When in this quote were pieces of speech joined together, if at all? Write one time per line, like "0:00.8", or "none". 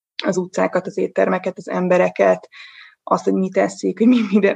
none